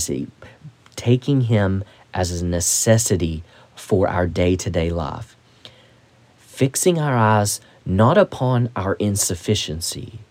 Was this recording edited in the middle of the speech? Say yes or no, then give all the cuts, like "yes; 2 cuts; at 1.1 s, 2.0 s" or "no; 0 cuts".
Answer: no; 0 cuts